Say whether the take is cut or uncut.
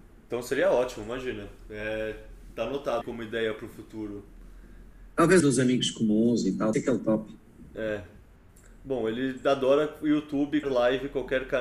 cut